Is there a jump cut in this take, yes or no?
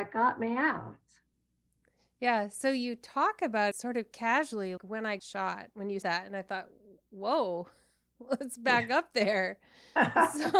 yes